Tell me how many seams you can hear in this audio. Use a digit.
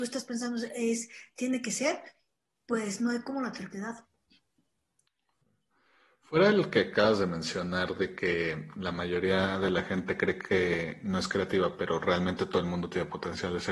0